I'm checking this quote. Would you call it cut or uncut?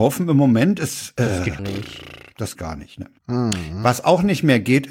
cut